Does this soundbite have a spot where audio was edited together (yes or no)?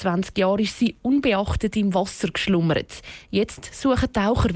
no